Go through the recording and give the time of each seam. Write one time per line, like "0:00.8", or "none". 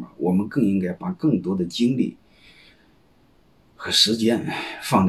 none

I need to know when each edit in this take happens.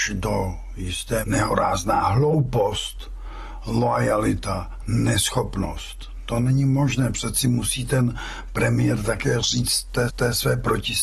0:01.2
0:10.1

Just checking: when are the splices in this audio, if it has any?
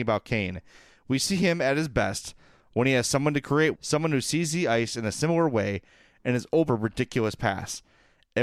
0:03.7
0:06.7

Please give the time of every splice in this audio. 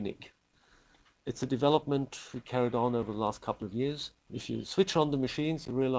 0:04.2

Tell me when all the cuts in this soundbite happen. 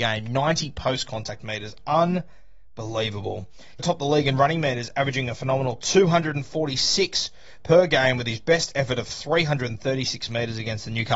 0:03.8

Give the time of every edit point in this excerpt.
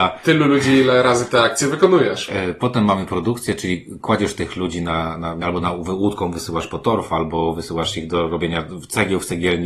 0:05.4

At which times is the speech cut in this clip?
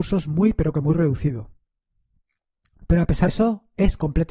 0:03.3

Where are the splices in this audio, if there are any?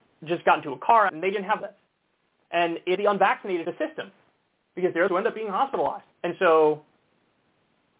0:01.1
0:01.6
0:03.0
0:03.6
0:05.1
0:06.1

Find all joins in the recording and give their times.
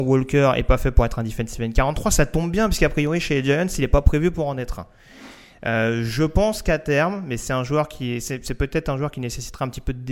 none

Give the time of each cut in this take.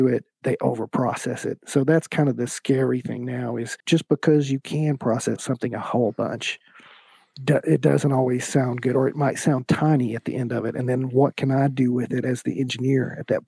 0:03.8

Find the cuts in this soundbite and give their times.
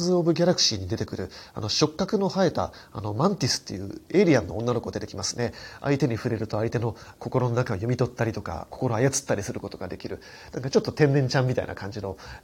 0:08.7

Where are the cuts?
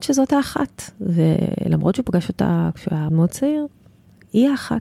0:03.1

